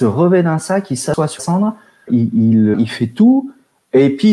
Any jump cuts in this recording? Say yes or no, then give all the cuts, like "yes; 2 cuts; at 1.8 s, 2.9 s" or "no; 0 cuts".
yes; 3 cuts; at 1.4 s, 2.1 s, 2.7 s